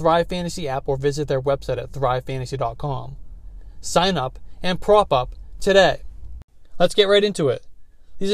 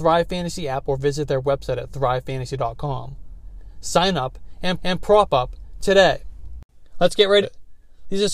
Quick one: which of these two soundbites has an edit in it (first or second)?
second